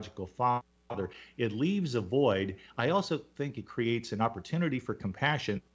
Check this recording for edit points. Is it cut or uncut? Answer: uncut